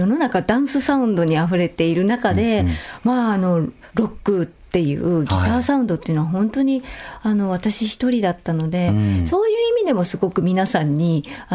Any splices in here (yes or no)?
yes